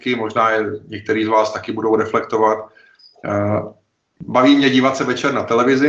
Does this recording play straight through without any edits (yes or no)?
yes